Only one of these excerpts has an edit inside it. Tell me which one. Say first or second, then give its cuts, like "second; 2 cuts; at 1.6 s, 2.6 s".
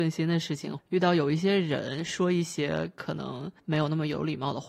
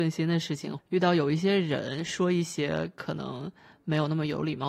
first; 1 cut; at 3.6 s